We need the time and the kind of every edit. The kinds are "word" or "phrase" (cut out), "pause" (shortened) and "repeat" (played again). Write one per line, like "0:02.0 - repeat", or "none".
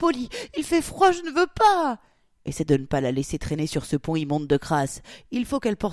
none